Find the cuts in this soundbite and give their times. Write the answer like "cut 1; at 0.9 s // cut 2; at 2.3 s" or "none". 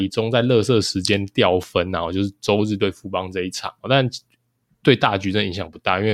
cut 1; at 3.8 s